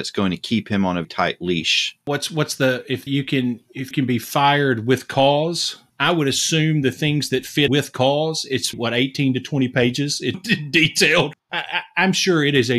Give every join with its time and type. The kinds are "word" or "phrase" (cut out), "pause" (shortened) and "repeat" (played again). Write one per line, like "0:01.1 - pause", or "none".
0:01.0 - word
0:03.1 - word
0:03.9 - word
0:07.7 - word
0:08.7 - word
0:10.3 - word